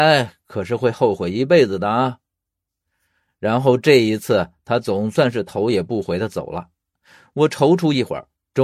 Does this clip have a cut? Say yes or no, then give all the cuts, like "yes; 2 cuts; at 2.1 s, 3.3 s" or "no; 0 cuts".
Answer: no; 0 cuts